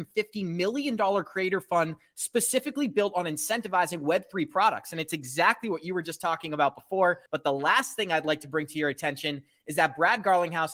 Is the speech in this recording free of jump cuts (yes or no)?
no